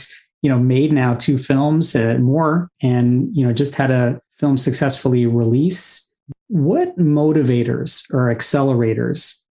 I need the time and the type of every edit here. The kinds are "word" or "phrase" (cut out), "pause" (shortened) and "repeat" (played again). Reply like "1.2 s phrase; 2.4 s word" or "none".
4.3 s pause